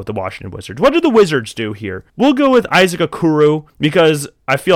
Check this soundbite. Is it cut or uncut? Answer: cut